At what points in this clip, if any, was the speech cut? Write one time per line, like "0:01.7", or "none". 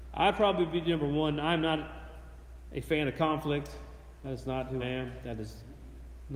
0:04.8